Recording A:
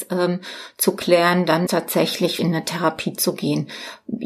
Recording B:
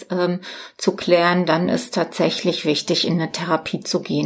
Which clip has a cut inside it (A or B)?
A